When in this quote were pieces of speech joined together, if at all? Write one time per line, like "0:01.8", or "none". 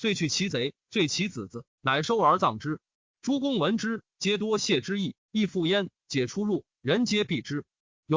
none